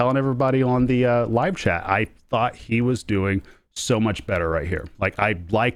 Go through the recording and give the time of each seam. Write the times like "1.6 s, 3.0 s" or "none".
none